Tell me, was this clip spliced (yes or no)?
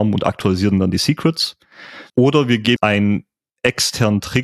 yes